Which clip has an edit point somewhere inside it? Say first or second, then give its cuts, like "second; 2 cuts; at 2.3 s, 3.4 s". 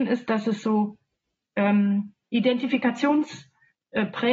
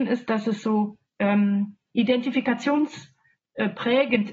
second; 1 cut; at 1.1 s